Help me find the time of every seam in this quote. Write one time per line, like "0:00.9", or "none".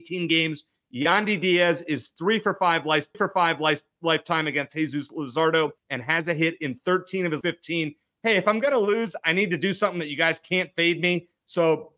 0:03.1
0:05.8
0:07.4